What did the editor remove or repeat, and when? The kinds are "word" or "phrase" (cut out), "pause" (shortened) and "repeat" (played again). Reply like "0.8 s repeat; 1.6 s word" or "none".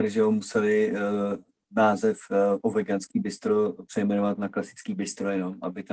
none